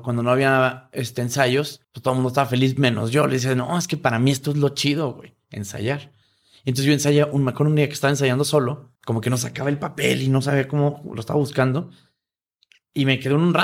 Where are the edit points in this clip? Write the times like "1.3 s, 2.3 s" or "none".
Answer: 1.8 s, 9.0 s